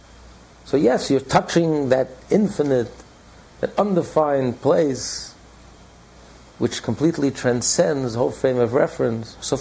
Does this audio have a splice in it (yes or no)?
no